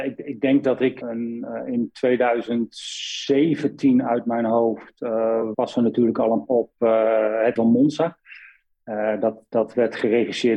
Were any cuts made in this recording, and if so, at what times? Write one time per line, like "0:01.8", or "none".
0:01.0
0:05.5
0:06.5
0:07.6